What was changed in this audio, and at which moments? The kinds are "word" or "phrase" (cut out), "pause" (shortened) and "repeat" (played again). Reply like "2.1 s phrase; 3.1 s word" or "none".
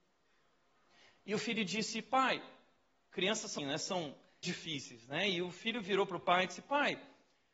3.6 s word; 4.4 s phrase